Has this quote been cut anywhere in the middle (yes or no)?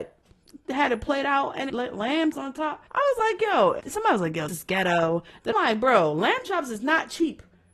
yes